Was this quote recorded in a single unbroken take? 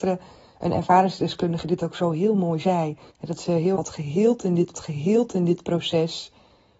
no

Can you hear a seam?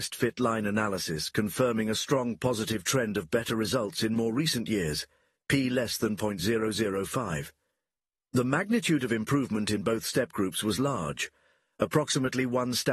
no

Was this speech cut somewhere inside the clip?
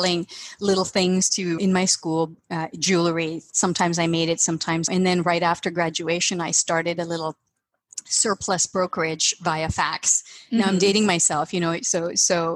yes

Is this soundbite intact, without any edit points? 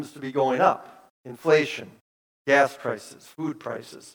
no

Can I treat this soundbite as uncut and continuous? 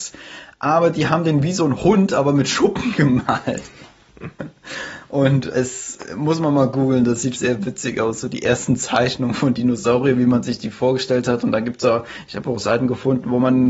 no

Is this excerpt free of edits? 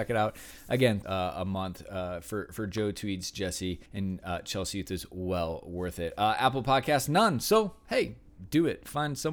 no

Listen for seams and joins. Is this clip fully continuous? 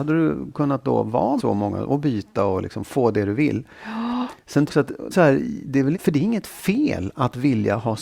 no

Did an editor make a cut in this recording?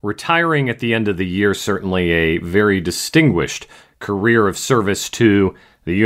no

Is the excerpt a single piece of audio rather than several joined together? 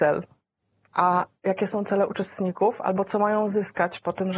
yes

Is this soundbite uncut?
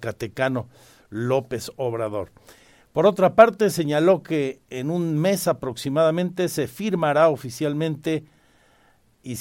yes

